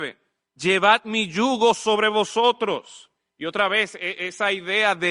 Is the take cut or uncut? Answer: uncut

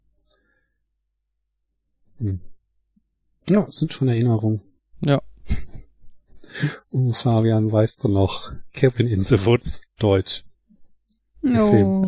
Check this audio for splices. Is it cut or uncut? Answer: uncut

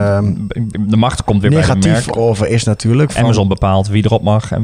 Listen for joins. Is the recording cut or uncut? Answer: cut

